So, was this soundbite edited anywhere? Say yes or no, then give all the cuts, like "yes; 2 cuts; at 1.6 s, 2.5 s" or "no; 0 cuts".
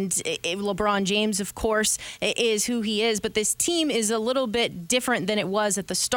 no; 0 cuts